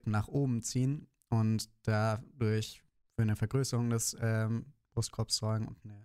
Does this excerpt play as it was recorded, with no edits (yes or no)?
yes